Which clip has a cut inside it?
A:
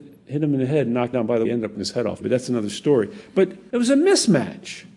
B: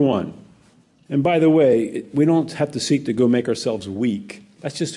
A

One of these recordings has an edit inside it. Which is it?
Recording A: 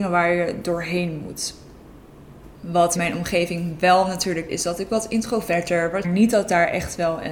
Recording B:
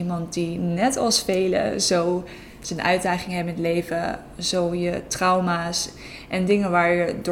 A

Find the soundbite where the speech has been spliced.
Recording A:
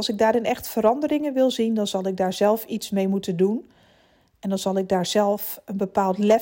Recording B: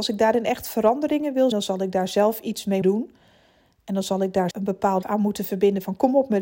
B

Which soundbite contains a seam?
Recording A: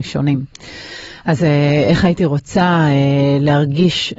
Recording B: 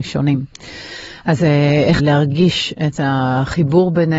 B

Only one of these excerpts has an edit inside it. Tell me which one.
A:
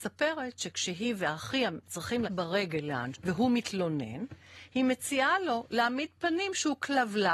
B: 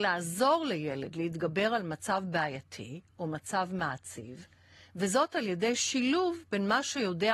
A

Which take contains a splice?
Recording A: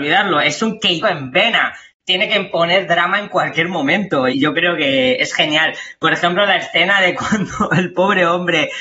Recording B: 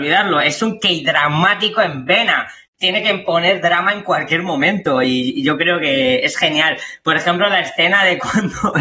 A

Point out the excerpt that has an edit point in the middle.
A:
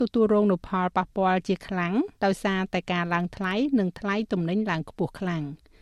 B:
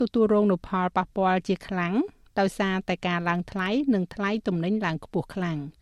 A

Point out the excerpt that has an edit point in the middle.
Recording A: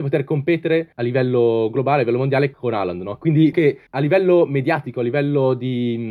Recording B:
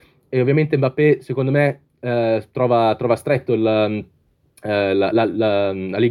A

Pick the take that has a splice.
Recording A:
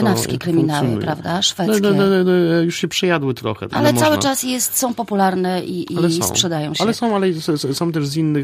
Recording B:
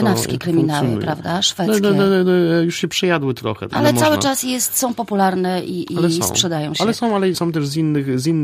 B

